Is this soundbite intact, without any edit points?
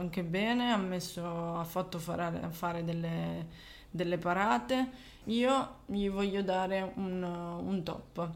no; 1 cut; at 5.2 s

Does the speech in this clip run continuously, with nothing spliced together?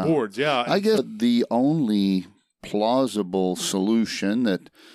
no; 1 cut; at 1.0 s

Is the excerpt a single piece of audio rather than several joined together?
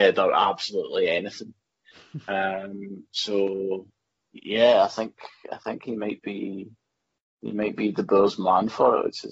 yes; 0 cuts

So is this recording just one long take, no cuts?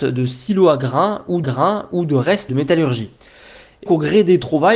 no; 3 cuts; at 1.4 s, 2.5 s, 3.9 s

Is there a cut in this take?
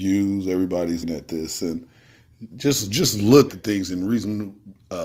yes; 3 cuts; at 1.0 s, 2.5 s, 3.5 s

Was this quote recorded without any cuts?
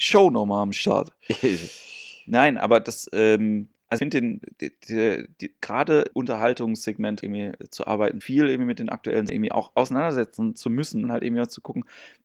no; 6 cuts; at 4.0 s, 6.1 s, 7.2 s, 8.2 s, 9.3 s, 11.0 s

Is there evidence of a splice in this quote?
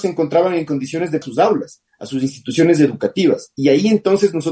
yes; 2 cuts; at 1.2 s, 1.9 s

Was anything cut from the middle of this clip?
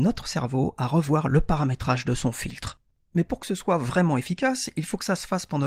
no; 0 cuts

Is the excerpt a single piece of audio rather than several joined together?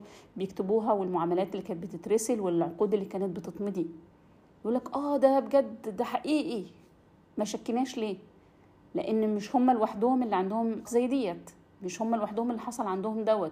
no; 1 cut; at 10.9 s

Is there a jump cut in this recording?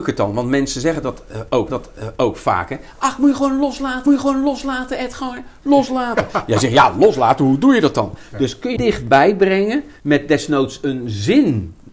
yes; 4 cuts; at 1.7 s, 4.1 s, 8.8 s, 10.0 s

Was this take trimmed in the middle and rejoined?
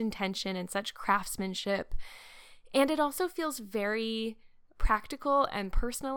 no; 0 cuts

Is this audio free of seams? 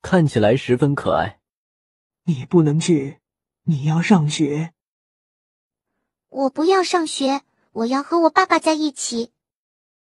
yes; 0 cuts

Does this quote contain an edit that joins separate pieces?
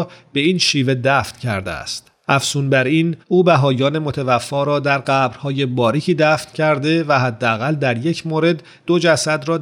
no; 0 cuts

